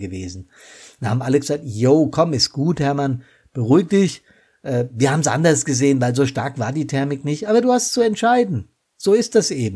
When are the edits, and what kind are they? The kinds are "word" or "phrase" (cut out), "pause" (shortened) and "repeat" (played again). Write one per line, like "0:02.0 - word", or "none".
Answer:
none

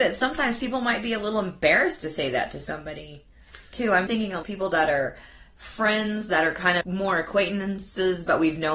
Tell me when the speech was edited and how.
0:03.7 - pause
0:04.1 - word
0:04.4 - word
0:06.8 - word

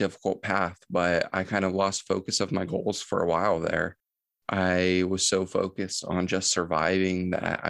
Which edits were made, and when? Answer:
none

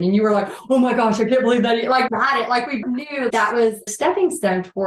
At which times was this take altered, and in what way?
0:02.1 - phrase
0:02.8 - word
0:03.3 - word
0:03.9 - word

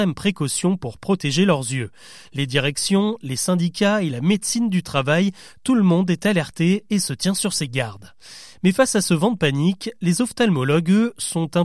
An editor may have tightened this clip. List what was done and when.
none

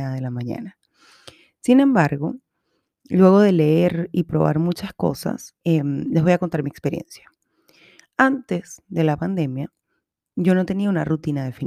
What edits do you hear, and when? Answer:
0:05.6 - pause

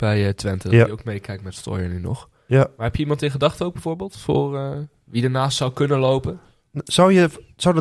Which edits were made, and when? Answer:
none

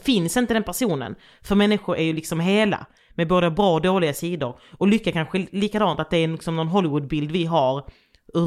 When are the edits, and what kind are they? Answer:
none

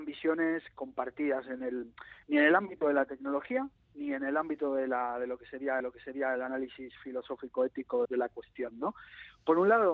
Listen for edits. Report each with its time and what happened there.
0:05.8 - repeat
0:08.0 - word

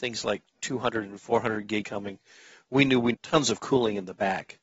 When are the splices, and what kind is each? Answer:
0:01.8 - word
0:03.1 - word

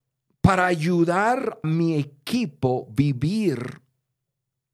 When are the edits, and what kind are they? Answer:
0:01.6 - word

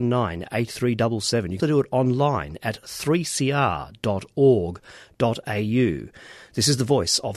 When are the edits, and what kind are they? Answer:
0:01.6 - word

